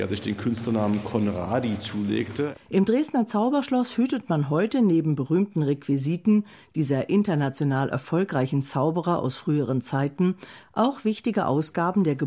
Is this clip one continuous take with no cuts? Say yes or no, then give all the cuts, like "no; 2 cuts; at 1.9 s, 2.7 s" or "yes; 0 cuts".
yes; 0 cuts